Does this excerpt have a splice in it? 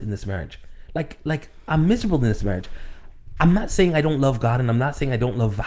no; 0 cuts

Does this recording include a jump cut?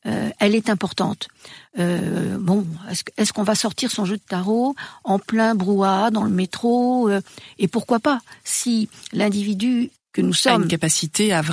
no; 0 cuts

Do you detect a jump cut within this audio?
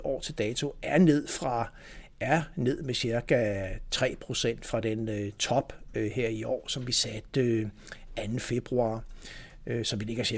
no; 0 cuts

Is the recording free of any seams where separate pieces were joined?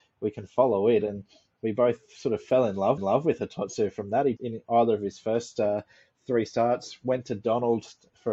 no; 2 cuts; at 3.0 s, 4.4 s

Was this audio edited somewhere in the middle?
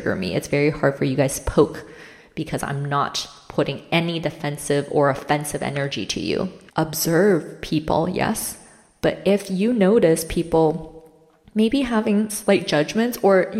no; 0 cuts

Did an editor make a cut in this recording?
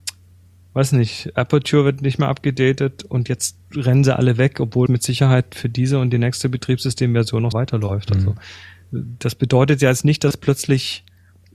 yes; 3 cuts; at 3.6 s, 4.9 s, 7.5 s

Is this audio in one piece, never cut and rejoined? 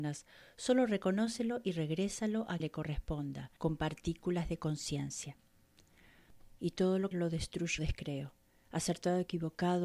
no; 5 cuts; at 2.6 s, 3.6 s, 6.6 s, 7.1 s, 7.8 s

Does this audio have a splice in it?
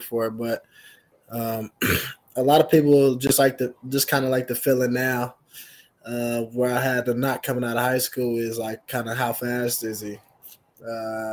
no; 0 cuts

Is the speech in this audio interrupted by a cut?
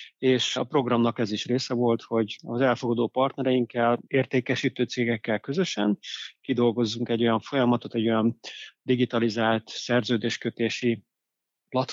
no; 0 cuts

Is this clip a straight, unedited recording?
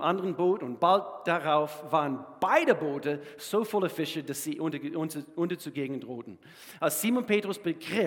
yes; 0 cuts

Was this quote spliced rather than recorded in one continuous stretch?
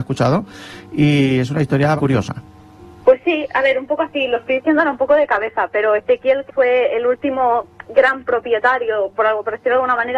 yes; 2 cuts; at 2.0 s, 6.5 s

